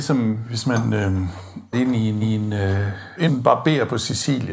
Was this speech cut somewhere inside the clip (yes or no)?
yes